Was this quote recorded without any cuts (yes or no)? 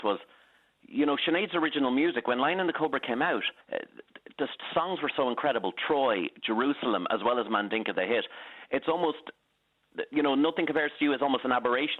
no